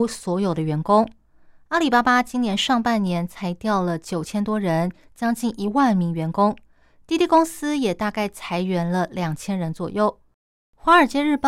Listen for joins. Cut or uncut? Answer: uncut